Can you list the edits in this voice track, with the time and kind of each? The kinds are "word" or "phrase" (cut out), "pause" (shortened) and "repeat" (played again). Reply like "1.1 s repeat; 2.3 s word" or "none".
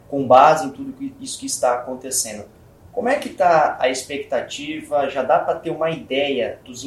none